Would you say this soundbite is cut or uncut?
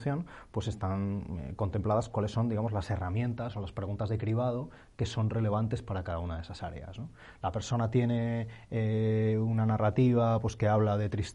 uncut